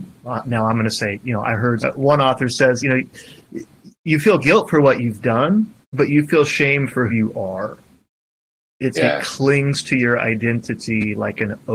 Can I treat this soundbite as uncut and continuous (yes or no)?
no